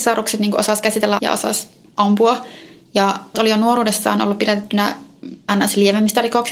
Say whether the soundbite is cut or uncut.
cut